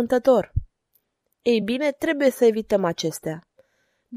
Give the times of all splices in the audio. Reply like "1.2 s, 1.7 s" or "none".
none